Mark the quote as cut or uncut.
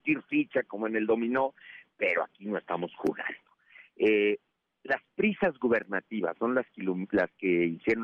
uncut